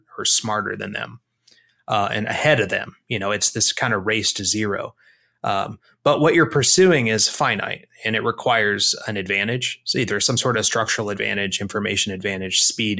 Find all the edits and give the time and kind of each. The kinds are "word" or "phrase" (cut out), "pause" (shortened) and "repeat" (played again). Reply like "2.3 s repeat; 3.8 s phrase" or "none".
none